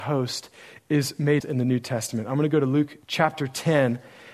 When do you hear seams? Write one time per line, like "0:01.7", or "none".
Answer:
0:01.4
0:03.0